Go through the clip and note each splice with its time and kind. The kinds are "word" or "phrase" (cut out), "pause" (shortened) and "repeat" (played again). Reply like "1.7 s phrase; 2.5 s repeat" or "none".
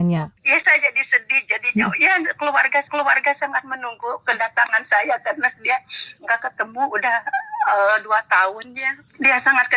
2.9 s repeat